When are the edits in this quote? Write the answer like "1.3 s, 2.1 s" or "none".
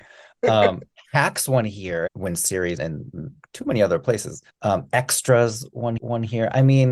2.1 s, 2.8 s, 4.5 s, 6.0 s